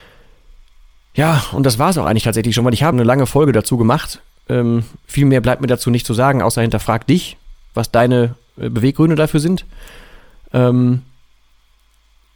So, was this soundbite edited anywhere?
yes; 1 cut; at 2.9 s

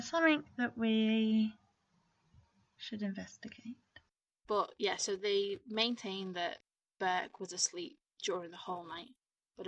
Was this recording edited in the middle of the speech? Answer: no; 0 cuts

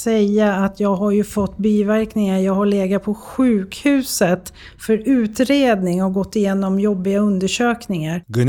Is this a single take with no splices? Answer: yes; 0 cuts

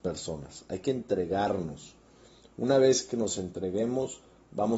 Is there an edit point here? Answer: no; 0 cuts

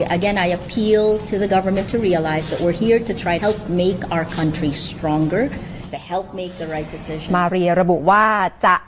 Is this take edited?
yes; 1 cut; at 3.4 s

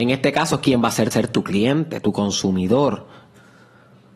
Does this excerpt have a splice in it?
yes; 1 cut; at 1.1 s

